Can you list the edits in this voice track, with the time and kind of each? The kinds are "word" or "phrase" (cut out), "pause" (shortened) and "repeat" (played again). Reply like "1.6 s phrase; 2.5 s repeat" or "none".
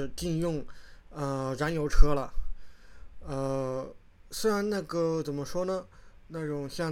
none